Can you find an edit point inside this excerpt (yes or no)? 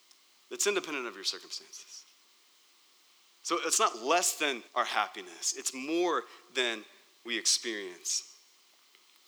yes